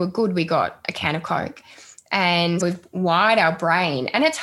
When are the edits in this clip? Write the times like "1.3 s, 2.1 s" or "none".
2.6 s